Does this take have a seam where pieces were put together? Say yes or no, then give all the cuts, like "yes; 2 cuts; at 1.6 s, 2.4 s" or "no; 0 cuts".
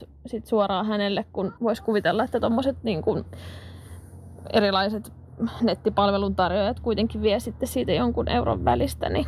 yes; 1 cut; at 1.6 s